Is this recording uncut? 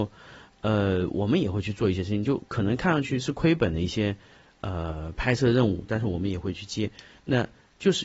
yes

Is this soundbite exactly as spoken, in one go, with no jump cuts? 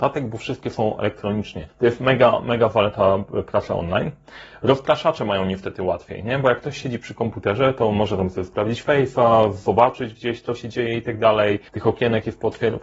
no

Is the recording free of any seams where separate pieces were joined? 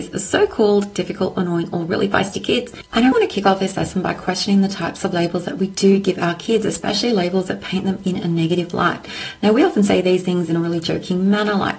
no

